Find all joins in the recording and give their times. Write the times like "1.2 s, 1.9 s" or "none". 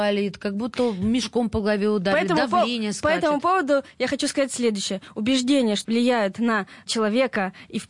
5.8 s